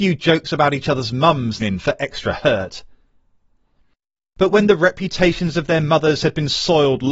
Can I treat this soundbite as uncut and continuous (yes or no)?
no